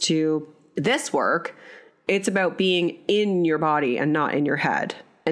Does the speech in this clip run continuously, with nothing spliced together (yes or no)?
yes